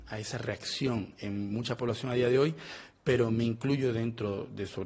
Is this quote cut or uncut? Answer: uncut